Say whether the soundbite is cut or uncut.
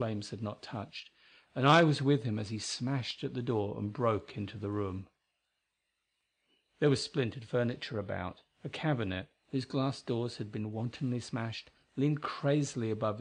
uncut